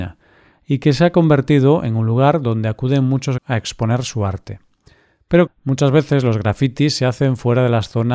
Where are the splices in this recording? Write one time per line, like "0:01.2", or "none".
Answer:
0:03.4
0:05.5